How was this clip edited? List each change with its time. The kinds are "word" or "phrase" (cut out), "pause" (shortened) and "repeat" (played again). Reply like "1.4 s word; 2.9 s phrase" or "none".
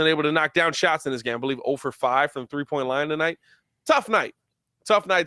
none